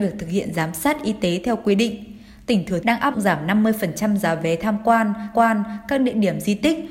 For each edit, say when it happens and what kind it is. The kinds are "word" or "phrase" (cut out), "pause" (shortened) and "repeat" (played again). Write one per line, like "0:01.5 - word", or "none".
0:02.8 - phrase
0:03.1 - word
0:05.3 - repeat